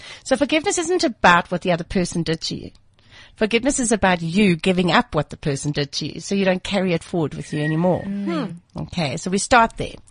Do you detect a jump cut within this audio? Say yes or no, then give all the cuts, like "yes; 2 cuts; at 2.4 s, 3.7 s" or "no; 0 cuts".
no; 0 cuts